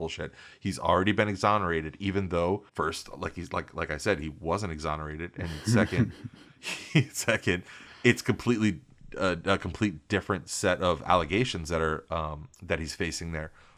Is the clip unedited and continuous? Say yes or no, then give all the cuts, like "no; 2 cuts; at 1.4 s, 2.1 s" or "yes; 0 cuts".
no; 2 cuts; at 2.7 s, 12.5 s